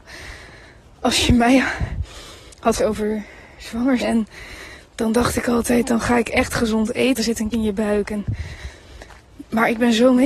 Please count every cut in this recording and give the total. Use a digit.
4